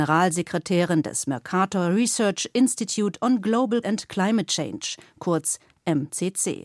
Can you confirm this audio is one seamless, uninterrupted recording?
no; 1 cut; at 3.8 s

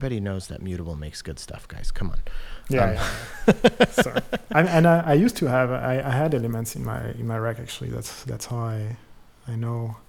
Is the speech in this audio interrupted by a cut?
no; 0 cuts

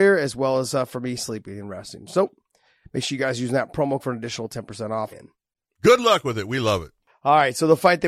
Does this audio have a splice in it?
yes; 2 cuts; at 4.0 s, 5.1 s

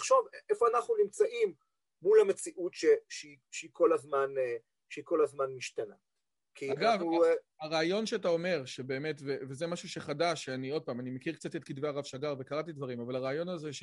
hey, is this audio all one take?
yes; 0 cuts

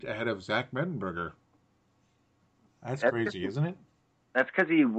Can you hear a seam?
no; 0 cuts

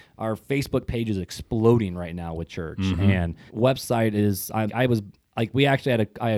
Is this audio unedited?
no; 2 cuts; at 3.5 s, 4.7 s

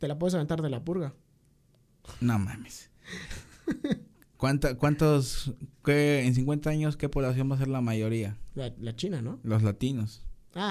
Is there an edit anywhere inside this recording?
no; 0 cuts

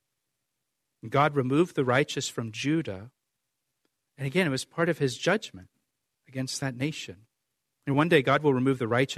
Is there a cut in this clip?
yes; 1 cut; at 7.4 s

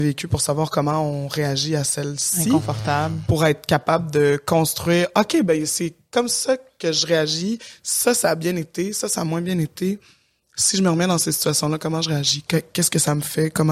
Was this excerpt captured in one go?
yes; 0 cuts

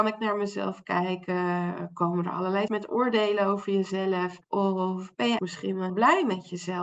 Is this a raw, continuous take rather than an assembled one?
no; 4 cuts; at 2.7 s, 4.4 s, 5.4 s, 5.9 s

